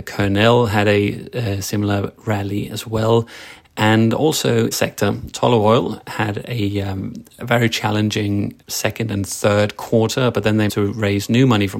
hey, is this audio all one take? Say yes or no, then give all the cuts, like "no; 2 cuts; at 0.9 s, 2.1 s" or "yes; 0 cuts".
no; 5 cuts; at 2.2 s, 4.7 s, 7.4 s, 8.6 s, 10.7 s